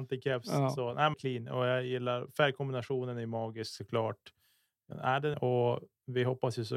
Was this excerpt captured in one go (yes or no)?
no